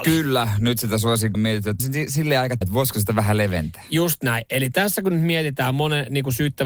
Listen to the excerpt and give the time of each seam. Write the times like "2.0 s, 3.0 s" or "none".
1.3 s, 1.8 s, 2.6 s